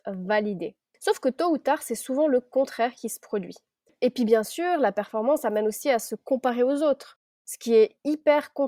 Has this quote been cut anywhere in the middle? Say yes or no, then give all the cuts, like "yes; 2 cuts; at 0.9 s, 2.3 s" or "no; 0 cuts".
no; 0 cuts